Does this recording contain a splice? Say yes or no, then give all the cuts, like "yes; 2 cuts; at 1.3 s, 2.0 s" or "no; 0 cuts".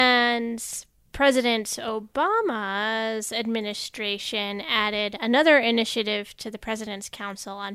no; 0 cuts